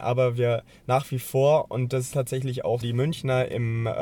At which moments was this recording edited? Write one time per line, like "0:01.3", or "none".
0:02.1
0:02.8